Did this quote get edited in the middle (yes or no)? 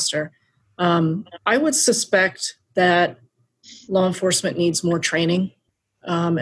no